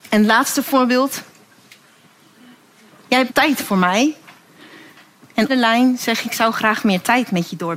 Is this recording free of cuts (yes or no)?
no